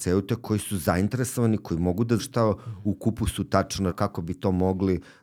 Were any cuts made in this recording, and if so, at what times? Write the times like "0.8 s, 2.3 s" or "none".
2.2 s, 3.9 s